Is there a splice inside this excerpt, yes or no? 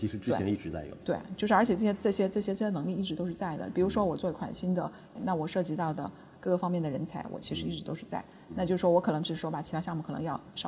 yes